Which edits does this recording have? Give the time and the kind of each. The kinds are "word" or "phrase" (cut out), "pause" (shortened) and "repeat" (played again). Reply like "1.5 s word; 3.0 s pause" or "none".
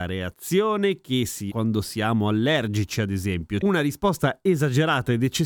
1.5 s word; 3.6 s word